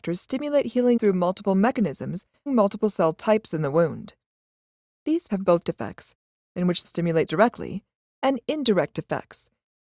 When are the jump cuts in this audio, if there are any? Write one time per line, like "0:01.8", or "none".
0:01.0
0:02.5
0:05.3
0:05.6
0:06.8
0:07.3